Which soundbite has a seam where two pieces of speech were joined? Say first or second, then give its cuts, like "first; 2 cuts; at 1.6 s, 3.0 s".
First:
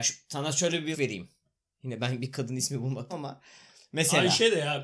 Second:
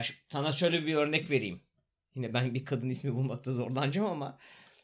first; 2 cuts; at 0.9 s, 3.1 s